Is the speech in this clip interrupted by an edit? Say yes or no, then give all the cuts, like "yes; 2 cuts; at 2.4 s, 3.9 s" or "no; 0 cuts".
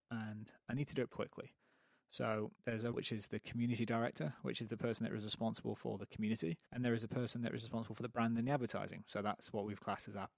yes; 4 cuts; at 1.1 s, 2.5 s, 2.9 s, 6.6 s